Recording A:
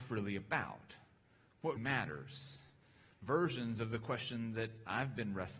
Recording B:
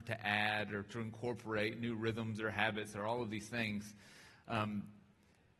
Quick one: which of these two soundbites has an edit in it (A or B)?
A